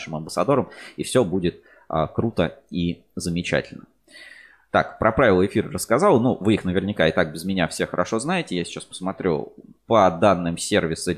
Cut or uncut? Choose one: uncut